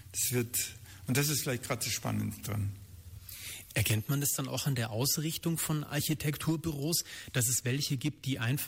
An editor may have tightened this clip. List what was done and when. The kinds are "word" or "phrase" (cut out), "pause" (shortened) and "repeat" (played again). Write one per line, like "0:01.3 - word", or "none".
none